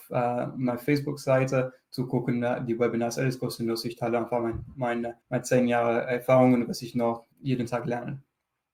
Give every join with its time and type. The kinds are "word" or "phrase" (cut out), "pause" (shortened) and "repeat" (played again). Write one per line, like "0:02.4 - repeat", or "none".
0:05.2 - pause
0:07.3 - pause